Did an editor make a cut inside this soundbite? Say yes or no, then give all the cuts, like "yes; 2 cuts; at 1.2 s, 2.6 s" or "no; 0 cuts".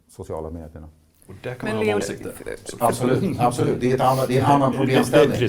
yes; 2 cuts; at 2.0 s, 2.8 s